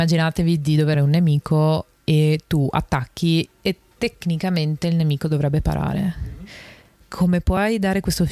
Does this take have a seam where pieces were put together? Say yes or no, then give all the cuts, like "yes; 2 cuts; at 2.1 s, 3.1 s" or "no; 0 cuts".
yes; 1 cut; at 0.9 s